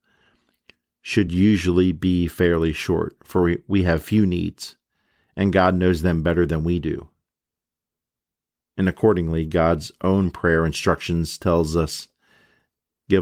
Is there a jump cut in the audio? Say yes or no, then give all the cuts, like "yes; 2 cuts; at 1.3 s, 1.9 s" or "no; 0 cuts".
no; 0 cuts